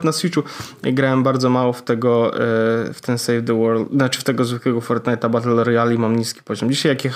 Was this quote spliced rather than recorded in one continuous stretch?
no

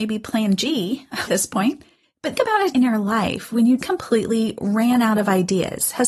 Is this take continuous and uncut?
no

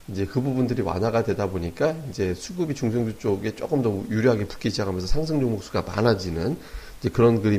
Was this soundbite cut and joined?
no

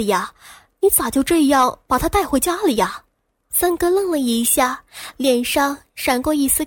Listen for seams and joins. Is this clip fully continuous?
no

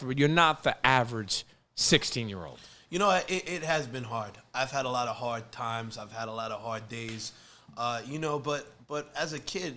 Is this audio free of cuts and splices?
yes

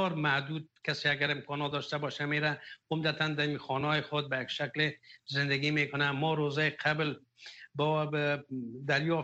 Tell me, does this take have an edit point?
no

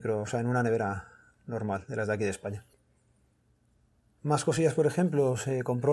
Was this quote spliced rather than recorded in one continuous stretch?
no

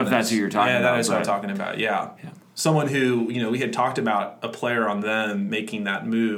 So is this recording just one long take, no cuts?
yes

